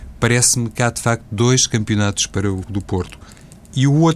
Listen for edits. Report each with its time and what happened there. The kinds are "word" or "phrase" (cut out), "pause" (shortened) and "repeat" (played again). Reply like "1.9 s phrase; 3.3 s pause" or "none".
2.6 s word